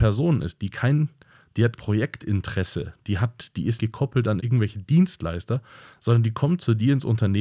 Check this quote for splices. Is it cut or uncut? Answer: cut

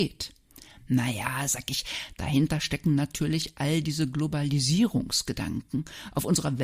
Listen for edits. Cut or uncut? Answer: uncut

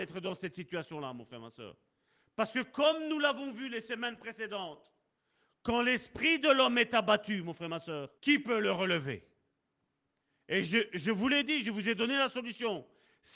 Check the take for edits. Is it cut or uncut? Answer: cut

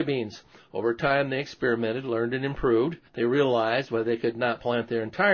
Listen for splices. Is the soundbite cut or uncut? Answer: cut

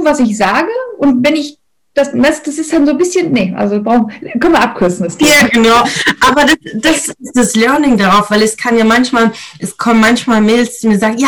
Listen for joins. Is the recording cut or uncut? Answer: uncut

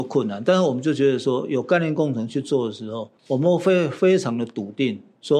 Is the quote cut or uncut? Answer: cut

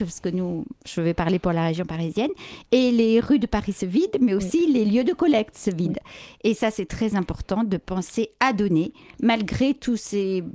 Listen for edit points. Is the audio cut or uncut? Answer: uncut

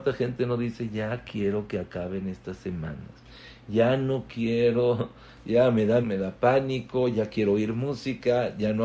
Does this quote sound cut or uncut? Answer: cut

